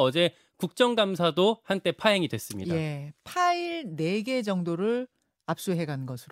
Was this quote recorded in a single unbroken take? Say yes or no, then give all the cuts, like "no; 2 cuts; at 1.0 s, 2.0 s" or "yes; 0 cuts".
yes; 0 cuts